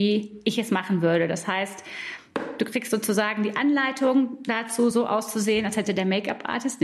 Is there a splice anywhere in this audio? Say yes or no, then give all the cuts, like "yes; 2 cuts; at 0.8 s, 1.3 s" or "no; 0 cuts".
no; 0 cuts